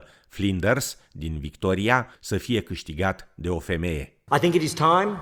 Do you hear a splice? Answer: yes; 1 cut; at 2.1 s

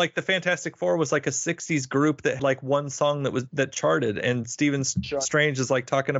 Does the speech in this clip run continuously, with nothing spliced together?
no; 1 cut; at 2.4 s

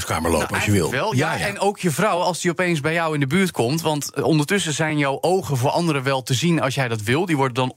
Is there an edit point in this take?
no; 0 cuts

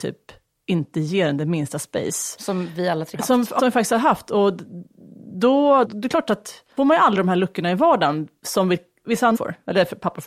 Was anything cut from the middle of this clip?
yes; 5 cuts; at 3.1 s, 3.6 s, 5.8 s, 6.8 s, 9.3 s

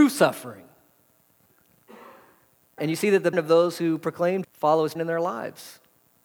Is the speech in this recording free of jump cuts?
no; 4 cuts; at 2.8 s, 3.3 s, 4.4 s, 5.0 s

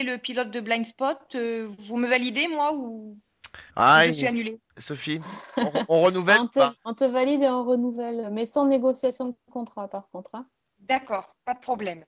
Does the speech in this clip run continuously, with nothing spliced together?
no; 4 cuts; at 3.7 s, 4.7 s, 6.8 s, 10.6 s

